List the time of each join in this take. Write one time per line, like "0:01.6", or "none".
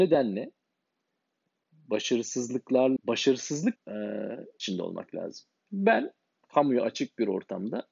0:03.0
0:03.8
0:04.6
0:06.4